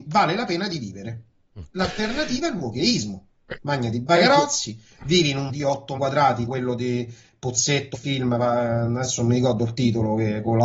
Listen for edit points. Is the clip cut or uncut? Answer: cut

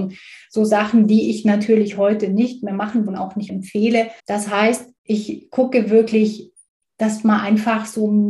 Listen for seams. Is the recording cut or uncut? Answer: cut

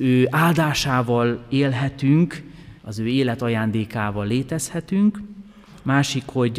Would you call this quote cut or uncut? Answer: cut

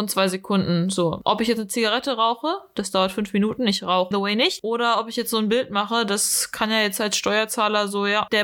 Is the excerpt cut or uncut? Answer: cut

